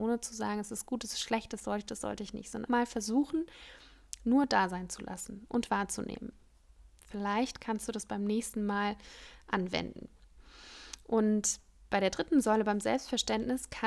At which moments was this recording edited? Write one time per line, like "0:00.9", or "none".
0:02.7